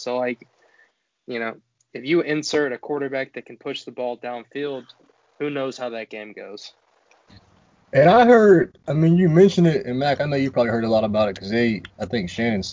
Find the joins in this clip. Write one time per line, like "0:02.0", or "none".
none